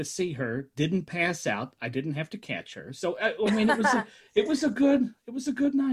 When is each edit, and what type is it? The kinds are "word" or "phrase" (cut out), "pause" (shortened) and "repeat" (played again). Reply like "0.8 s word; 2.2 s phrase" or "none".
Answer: none